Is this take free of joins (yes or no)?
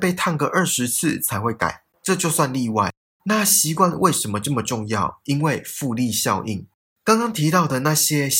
yes